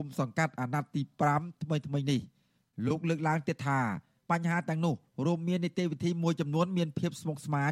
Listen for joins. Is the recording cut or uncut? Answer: uncut